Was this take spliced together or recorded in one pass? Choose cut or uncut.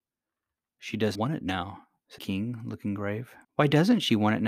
cut